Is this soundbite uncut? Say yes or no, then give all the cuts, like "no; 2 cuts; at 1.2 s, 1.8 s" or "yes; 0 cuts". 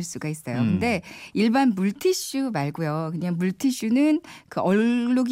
yes; 0 cuts